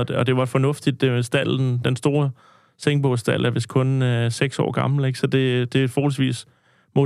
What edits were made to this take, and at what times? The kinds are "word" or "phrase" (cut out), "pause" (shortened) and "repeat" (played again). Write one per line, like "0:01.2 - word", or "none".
none